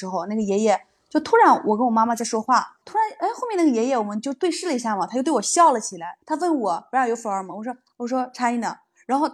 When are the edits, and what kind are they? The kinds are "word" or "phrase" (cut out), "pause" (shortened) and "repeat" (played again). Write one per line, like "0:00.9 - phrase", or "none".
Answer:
0:02.8 - pause
0:06.2 - pause